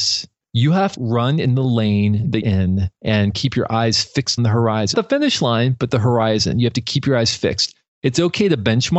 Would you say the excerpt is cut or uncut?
cut